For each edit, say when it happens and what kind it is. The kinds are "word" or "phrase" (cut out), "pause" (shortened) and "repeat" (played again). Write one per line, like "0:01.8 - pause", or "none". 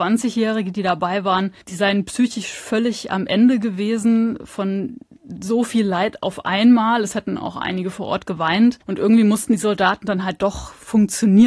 0:01.6 - pause
0:08.8 - pause